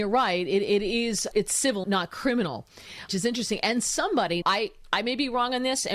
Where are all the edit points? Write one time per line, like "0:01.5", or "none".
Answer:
0:01.3
0:01.8
0:03.1
0:04.4